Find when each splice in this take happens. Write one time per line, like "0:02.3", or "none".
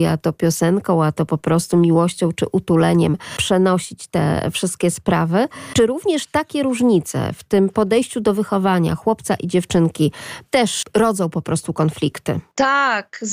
none